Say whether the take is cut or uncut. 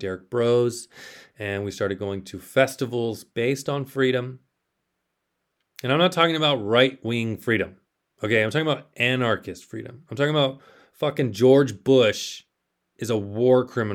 uncut